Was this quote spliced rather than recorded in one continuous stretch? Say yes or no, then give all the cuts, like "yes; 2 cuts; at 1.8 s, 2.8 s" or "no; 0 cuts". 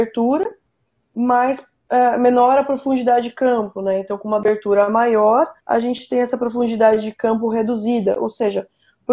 yes; 1 cut; at 5.6 s